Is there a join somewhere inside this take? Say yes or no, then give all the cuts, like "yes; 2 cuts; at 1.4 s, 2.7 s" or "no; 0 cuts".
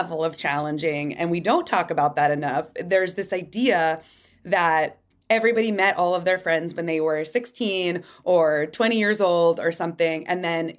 no; 0 cuts